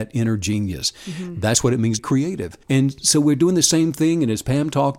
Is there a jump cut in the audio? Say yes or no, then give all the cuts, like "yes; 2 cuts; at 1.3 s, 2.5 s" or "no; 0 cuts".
yes; 2 cuts; at 2.0 s, 2.6 s